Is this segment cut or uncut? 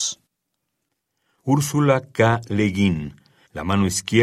uncut